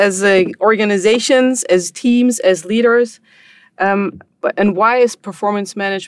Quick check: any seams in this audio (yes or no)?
no